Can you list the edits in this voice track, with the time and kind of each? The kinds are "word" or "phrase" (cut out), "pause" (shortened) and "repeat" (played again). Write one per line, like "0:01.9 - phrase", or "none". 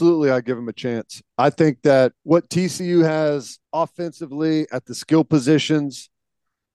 0:02.2 - pause
0:03.7 - pause